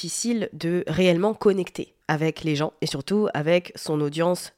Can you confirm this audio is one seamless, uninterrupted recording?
no; 1 cut; at 2.0 s

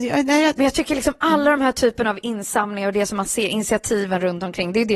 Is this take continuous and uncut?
yes; 0 cuts

